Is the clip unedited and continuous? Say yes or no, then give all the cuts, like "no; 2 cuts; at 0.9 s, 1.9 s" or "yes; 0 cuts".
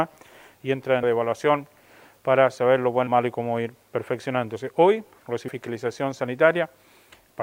no; 3 cuts; at 1.0 s, 3.1 s, 5.5 s